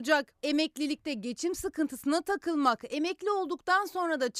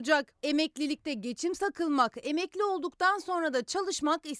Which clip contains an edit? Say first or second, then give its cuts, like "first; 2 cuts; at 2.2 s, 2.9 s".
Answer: second; 1 cut; at 1.6 s